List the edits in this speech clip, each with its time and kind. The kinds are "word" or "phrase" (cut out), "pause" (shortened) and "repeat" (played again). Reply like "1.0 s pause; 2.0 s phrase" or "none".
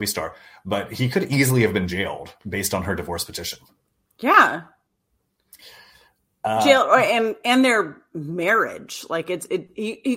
none